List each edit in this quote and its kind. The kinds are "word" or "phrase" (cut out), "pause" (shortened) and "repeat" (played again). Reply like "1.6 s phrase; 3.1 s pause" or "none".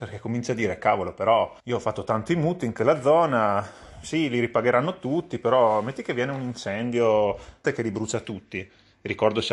1.6 s pause; 7.6 s word